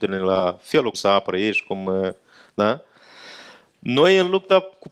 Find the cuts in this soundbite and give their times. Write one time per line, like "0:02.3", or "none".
0:00.9